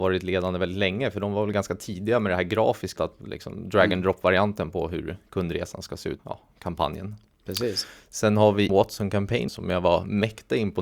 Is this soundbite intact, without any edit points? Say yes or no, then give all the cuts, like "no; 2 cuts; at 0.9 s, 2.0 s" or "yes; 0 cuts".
no; 4 cuts; at 3.0 s, 6.2 s, 8.7 s, 9.5 s